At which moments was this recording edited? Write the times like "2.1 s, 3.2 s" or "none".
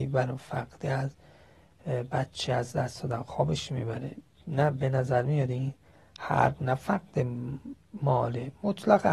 none